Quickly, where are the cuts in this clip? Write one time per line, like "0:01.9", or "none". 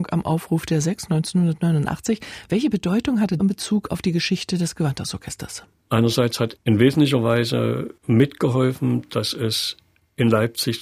0:03.4
0:06.6
0:08.0